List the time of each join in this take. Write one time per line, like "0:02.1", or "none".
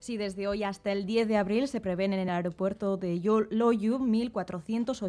none